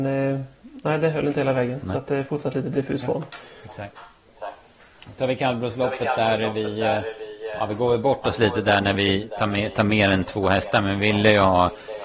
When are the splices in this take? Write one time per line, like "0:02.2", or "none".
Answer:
none